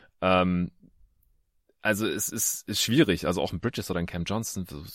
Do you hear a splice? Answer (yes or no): no